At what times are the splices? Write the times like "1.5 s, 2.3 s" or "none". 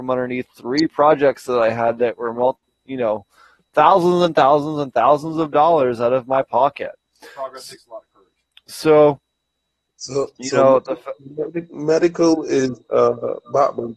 none

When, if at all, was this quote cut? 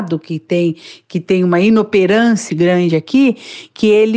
2.5 s

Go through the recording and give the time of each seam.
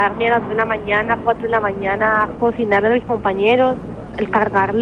none

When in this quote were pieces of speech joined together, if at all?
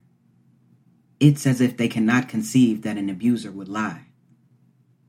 none

